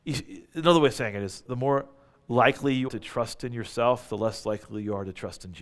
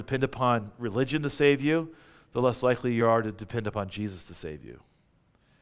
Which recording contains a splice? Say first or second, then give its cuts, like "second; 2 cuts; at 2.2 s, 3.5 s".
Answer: first; 2 cuts; at 1.4 s, 2.9 s